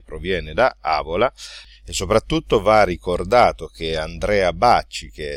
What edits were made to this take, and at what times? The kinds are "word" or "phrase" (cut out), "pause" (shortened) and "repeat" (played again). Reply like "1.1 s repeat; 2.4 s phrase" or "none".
none